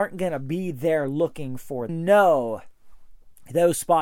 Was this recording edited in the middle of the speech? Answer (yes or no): yes